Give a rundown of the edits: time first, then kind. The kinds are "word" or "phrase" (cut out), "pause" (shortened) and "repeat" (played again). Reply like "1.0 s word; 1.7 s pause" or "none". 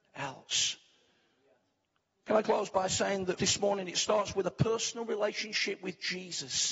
2.4 s word; 3.4 s word